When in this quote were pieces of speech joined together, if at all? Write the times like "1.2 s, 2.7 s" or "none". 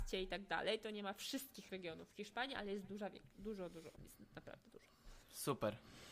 3.9 s, 5.2 s